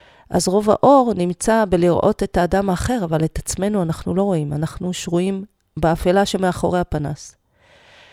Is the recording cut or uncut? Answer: uncut